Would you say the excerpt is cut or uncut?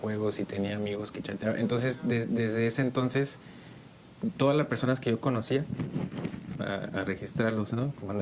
uncut